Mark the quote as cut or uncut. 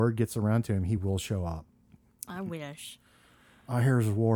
uncut